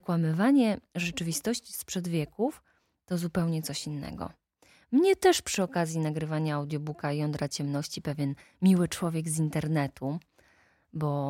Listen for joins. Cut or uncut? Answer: uncut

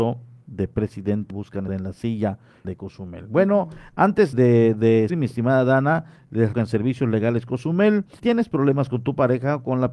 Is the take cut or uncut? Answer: cut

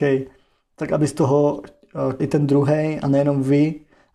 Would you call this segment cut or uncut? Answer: cut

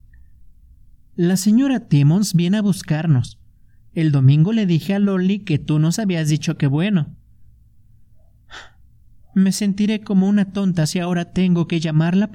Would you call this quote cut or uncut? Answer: uncut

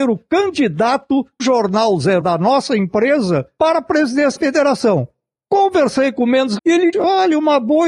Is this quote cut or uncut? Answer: cut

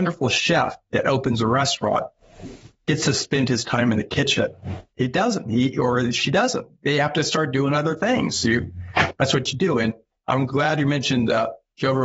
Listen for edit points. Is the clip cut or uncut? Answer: uncut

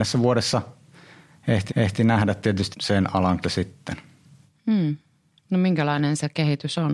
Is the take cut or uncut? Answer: cut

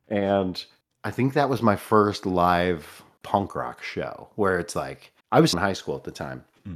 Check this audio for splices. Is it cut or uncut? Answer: cut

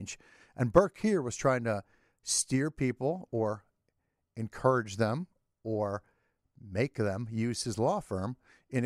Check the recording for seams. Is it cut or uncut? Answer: uncut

